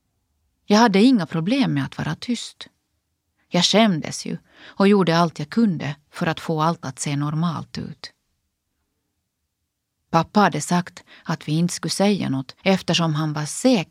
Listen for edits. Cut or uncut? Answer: cut